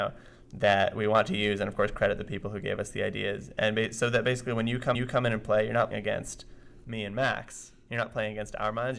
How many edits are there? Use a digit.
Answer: 2